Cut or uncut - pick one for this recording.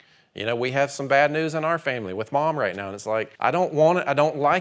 cut